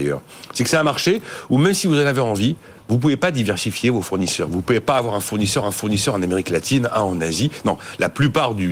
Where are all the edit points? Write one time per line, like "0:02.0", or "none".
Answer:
0:05.6